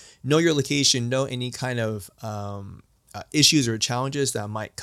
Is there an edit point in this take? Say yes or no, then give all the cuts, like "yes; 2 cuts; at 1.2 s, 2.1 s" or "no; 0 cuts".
no; 0 cuts